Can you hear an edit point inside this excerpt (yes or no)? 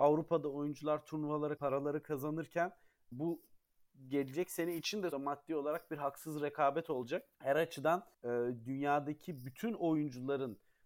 yes